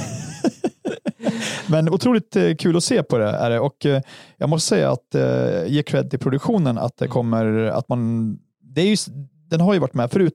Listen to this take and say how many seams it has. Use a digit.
0